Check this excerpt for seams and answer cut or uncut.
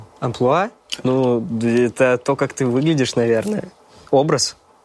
uncut